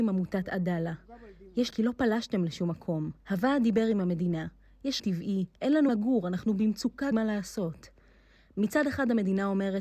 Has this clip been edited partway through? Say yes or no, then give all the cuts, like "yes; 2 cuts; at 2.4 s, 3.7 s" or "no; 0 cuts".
yes; 5 cuts; at 1.7 s, 3.2 s, 5.0 s, 5.9 s, 7.1 s